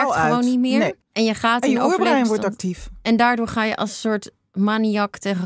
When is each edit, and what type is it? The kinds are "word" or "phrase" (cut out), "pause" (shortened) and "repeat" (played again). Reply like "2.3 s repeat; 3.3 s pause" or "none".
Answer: 1.0 s pause